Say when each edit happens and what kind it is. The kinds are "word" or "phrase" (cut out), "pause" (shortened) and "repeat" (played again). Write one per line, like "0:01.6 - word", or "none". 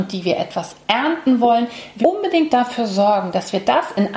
0:02.0 - word